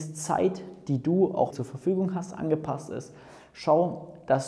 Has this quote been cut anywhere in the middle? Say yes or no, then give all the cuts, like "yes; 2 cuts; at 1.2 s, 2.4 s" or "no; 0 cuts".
yes; 1 cut; at 1.5 s